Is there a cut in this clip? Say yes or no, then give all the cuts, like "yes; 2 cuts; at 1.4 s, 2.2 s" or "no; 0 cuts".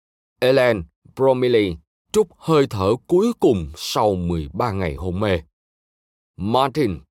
no; 0 cuts